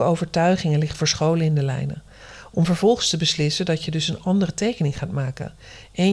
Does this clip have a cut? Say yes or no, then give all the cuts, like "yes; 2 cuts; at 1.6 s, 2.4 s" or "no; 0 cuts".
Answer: no; 0 cuts